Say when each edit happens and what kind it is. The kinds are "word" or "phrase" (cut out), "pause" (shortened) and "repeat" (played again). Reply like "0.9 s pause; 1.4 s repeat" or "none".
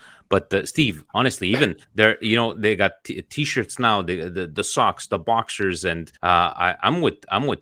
1.8 s pause; 6.2 s pause